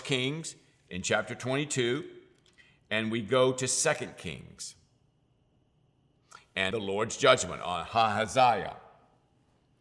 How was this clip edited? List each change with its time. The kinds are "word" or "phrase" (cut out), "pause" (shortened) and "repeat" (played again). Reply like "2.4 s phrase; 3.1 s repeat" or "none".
6.7 s word